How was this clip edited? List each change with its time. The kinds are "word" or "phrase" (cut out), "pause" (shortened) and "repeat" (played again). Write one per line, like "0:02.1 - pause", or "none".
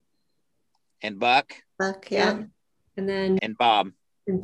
0:03.4 - word